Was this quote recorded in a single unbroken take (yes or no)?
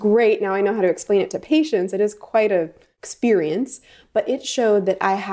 yes